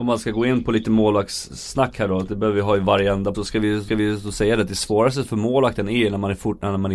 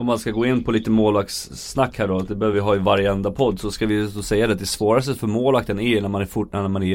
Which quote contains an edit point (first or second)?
first